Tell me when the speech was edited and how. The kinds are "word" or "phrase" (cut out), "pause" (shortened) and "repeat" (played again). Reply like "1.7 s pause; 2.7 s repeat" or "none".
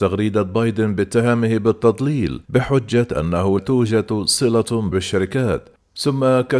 2.4 s pause; 3.6 s word; 4.9 s phrase